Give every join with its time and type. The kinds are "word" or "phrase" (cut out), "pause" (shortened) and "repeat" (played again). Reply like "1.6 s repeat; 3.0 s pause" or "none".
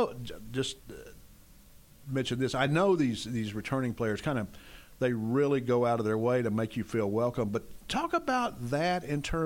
none